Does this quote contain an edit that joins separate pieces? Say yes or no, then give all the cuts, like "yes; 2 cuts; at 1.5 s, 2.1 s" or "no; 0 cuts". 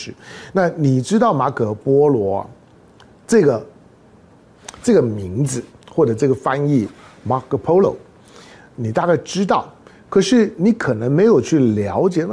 no; 0 cuts